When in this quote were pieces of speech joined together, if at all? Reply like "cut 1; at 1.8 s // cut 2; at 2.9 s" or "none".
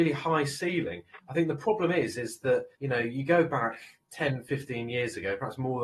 cut 1; at 2.7 s